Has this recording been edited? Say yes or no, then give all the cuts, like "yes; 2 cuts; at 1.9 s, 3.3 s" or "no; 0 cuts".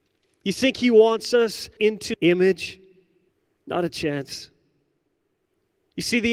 yes; 3 cuts; at 1.8 s, 2.1 s, 3.3 s